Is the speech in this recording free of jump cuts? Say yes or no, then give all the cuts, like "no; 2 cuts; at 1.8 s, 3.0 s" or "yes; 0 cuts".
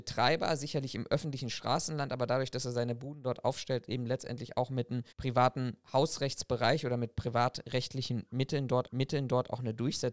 no; 2 cuts; at 5.1 s, 8.9 s